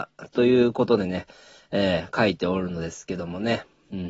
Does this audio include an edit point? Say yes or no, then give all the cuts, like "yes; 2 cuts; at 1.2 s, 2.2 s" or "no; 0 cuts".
no; 0 cuts